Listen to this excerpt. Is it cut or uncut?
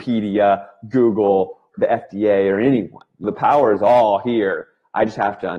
cut